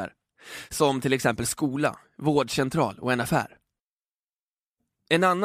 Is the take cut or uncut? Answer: uncut